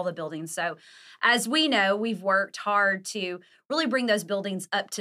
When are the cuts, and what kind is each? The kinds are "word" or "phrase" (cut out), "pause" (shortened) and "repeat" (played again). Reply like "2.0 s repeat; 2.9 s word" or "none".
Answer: none